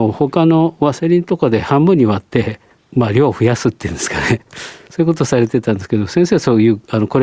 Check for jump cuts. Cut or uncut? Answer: uncut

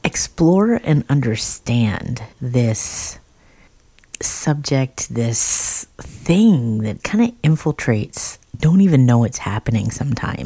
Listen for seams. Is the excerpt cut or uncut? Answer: cut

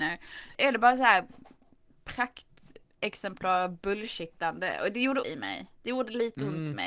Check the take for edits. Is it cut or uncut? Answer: cut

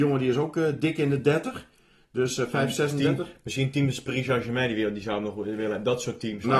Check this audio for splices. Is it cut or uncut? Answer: uncut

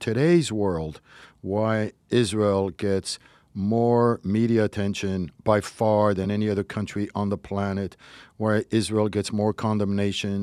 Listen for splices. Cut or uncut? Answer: uncut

